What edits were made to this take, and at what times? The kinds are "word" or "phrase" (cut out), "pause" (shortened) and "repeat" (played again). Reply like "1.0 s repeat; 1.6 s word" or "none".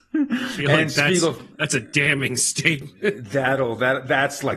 none